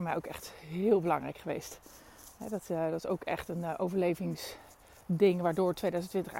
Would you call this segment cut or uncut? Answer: uncut